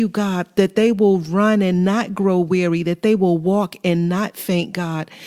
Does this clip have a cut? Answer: no; 0 cuts

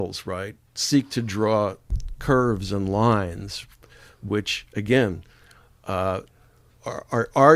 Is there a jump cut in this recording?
no; 0 cuts

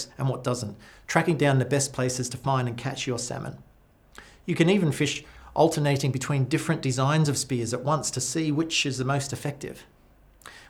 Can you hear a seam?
no; 0 cuts

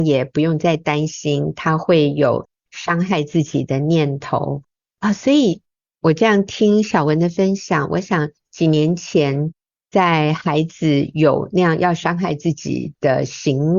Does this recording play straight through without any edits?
yes; 0 cuts

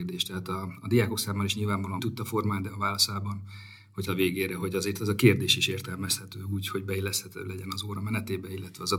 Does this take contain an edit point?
yes; 2 cuts; at 2.0 s, 4.1 s

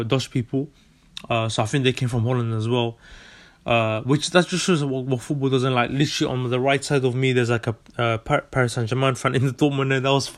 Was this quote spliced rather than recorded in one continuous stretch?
no; 0 cuts

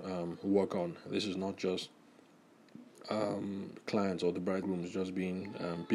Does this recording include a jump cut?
yes; 1 cut; at 4.6 s

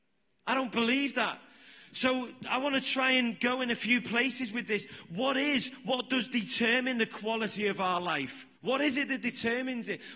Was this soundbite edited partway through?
yes; 1 cut; at 8.6 s

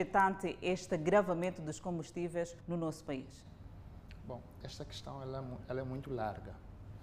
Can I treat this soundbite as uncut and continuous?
no; 1 cut; at 2.6 s

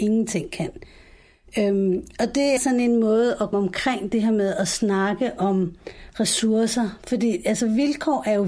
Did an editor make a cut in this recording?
yes; 2 cuts; at 2.6 s, 3.5 s

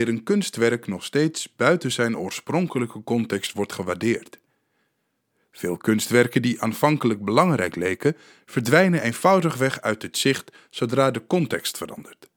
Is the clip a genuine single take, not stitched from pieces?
yes; 0 cuts

